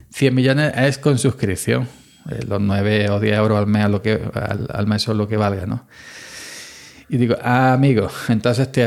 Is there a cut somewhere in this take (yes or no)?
no